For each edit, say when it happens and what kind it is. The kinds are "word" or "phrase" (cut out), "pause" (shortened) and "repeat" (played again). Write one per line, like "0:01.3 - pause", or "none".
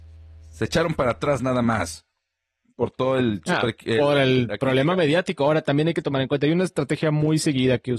none